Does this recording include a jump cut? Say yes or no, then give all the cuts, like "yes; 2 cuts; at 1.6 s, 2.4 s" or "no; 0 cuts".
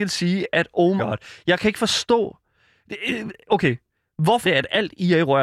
yes; 2 cuts; at 1.0 s, 4.4 s